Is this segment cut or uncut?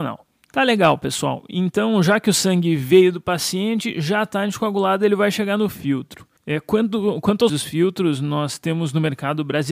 cut